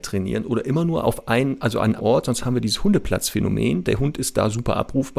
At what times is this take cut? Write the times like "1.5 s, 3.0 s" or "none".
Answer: 2.0 s